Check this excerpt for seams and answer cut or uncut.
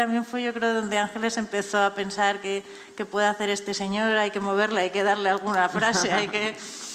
uncut